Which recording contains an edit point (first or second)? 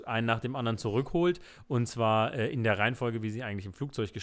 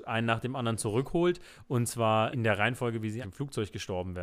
second